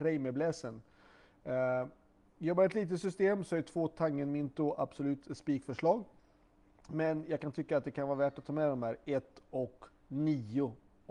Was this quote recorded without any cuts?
yes; 0 cuts

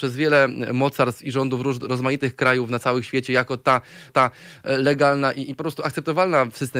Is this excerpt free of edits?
no; 1 cut; at 4.1 s

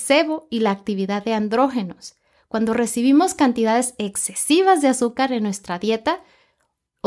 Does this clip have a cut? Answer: no; 0 cuts

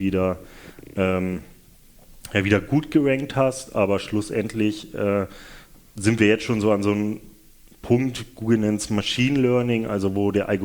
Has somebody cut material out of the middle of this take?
no; 0 cuts

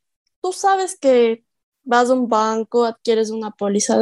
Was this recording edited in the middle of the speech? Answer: no; 0 cuts

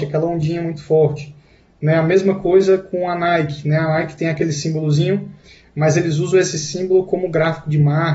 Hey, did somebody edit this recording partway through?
no; 0 cuts

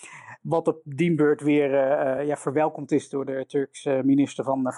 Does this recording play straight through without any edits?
yes; 0 cuts

